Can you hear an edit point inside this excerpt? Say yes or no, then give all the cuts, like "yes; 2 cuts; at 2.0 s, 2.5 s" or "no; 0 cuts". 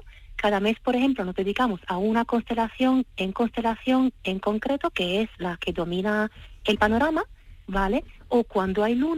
yes; 1 cut; at 3.3 s